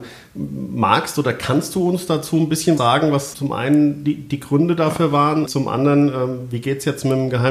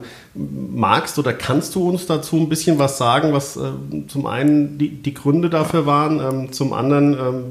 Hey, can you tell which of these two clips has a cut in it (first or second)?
first